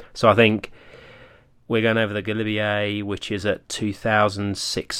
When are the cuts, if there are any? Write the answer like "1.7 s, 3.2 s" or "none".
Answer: none